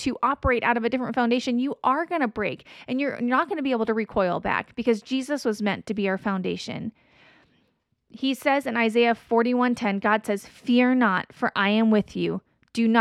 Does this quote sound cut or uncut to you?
uncut